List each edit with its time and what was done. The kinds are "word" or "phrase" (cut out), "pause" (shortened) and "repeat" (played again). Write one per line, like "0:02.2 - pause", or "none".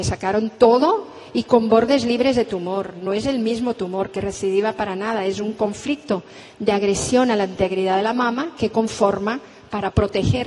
none